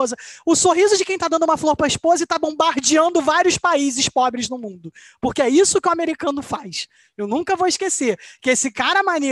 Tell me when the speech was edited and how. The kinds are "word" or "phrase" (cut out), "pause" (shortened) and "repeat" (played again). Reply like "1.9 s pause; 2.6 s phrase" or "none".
none